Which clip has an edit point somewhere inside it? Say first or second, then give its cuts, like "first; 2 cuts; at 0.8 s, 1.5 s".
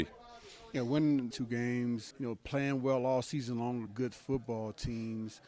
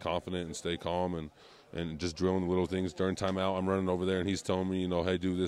first; 3 cuts; at 1.3 s, 2.1 s, 3.9 s